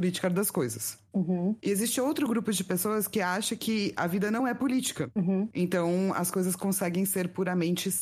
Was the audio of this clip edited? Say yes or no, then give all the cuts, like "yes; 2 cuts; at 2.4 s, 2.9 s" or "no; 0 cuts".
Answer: no; 0 cuts